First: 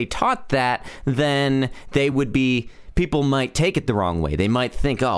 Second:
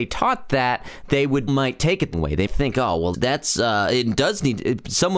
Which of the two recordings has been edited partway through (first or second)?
second